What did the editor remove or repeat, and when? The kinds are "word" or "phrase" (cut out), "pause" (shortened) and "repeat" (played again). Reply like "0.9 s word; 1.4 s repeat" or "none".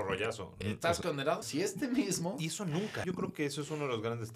1.4 s word; 3.0 s word